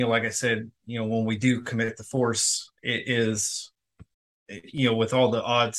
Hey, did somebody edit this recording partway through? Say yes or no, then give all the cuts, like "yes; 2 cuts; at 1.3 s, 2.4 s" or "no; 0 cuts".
yes; 1 cut; at 4.1 s